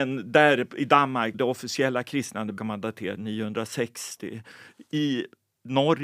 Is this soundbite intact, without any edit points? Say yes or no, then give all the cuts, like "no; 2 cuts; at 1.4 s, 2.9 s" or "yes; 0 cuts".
no; 3 cuts; at 1.3 s, 2.6 s, 3.2 s